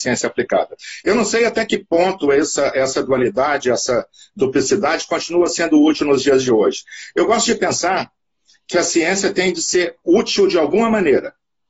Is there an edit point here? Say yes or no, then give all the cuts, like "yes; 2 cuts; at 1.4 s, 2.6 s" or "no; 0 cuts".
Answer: no; 0 cuts